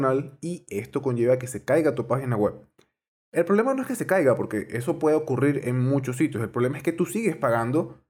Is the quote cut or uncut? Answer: uncut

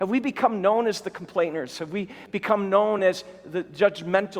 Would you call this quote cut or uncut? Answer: uncut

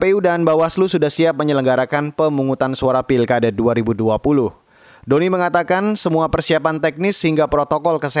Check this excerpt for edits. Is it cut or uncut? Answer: uncut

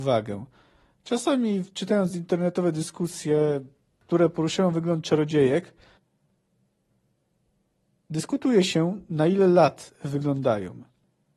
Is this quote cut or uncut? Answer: uncut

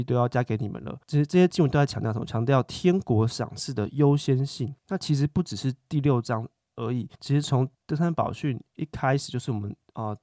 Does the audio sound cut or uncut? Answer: cut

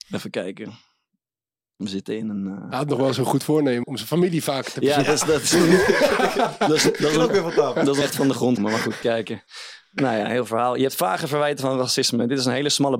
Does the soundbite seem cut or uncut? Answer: cut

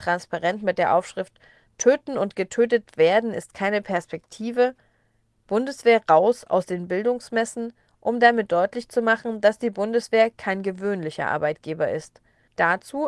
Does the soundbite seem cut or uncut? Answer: uncut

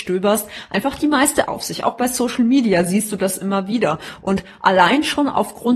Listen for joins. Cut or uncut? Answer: cut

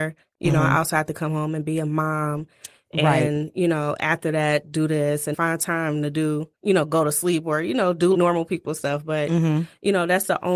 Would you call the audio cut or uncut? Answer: cut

